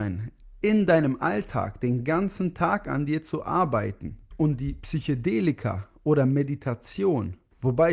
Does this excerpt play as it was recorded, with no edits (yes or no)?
yes